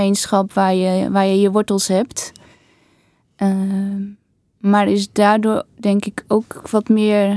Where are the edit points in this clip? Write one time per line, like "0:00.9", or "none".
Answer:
none